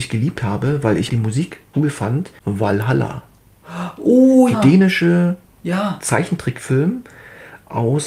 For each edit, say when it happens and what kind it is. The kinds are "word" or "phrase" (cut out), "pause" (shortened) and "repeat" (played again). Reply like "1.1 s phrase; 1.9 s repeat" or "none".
1.1 s word; 1.7 s word; 2.4 s pause; 4.5 s word